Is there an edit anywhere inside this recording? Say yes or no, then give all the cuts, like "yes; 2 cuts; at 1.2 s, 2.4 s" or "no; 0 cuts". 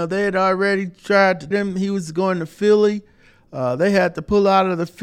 yes; 1 cut; at 1.5 s